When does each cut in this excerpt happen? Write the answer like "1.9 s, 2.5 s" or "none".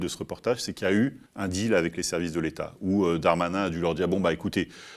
1.3 s